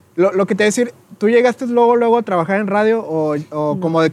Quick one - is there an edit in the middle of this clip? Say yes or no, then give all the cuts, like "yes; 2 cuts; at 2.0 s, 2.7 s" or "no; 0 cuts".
no; 0 cuts